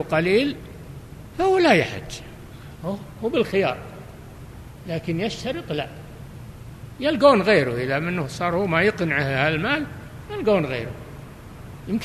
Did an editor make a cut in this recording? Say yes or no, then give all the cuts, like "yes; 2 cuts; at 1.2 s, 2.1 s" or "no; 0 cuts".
no; 0 cuts